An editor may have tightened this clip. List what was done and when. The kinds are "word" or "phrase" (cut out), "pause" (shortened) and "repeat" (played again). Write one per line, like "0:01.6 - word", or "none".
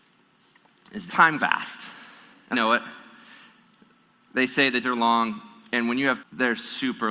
0:01.1 - word
0:01.4 - word
0:02.5 - word
0:04.8 - word
0:06.2 - word